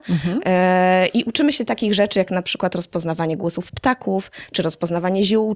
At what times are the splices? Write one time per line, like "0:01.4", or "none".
none

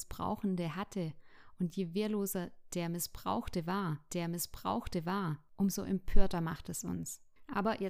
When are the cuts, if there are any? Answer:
0:04.1

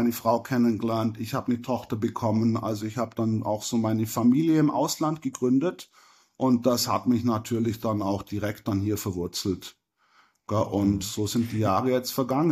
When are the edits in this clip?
none

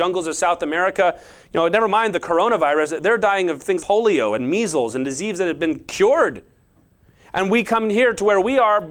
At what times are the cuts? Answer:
0:03.8

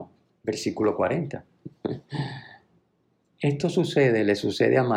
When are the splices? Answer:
none

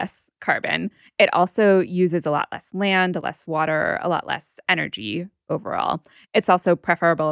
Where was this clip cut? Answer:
0:03.2

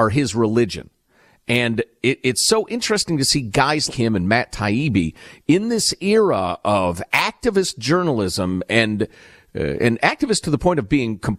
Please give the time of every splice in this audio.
0:03.9

